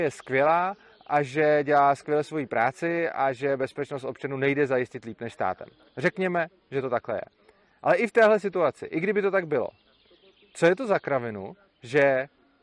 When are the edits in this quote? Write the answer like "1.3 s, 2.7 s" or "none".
none